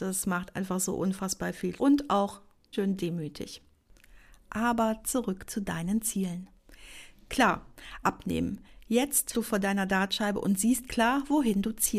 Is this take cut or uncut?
cut